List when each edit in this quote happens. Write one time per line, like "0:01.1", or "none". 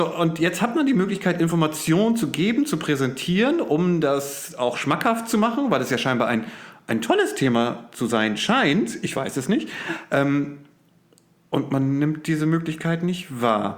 none